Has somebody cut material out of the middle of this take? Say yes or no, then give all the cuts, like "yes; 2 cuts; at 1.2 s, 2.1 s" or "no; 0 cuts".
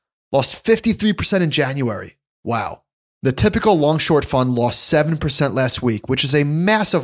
yes; 1 cut; at 3.1 s